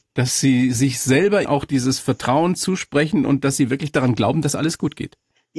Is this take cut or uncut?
cut